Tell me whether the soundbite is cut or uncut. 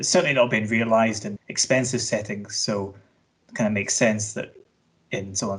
cut